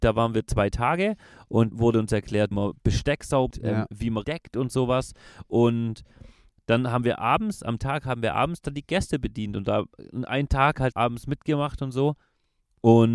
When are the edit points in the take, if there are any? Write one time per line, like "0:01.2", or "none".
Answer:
0:01.7
0:02.5
0:03.5
0:04.2
0:07.8
0:10.9

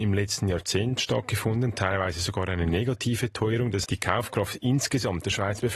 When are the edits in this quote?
0:03.8

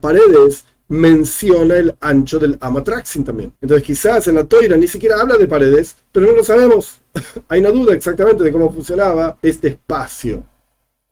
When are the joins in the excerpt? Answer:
0:03.6
0:09.4

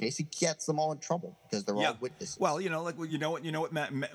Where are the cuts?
none

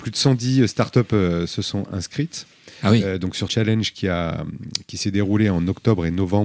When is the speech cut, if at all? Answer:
0:03.5

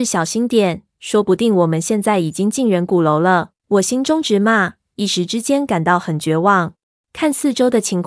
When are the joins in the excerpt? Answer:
0:03.6
0:06.9

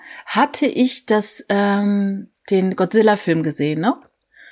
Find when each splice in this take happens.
none

